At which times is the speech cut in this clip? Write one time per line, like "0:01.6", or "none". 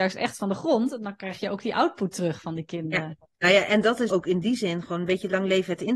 0:03.3
0:04.1